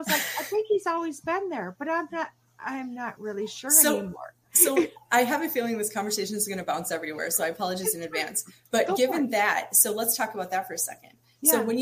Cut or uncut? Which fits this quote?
uncut